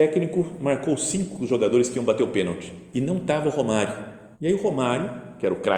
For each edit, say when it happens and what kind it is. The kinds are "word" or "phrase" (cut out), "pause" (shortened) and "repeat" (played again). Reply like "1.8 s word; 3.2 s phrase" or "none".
4.3 s pause